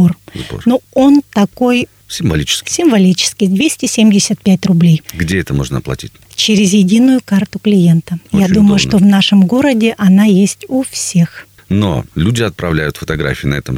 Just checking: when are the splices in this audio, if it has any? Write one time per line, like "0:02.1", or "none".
0:05.1
0:08.3
0:12.1